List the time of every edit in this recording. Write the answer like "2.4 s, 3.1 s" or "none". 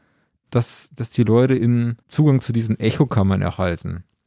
2.0 s